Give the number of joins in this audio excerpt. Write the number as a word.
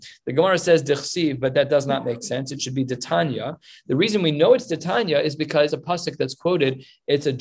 one